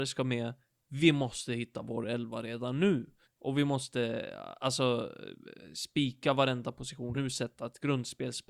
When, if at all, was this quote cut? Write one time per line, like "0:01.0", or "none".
0:03.2
0:07.1